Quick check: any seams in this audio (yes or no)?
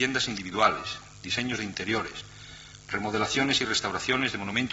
no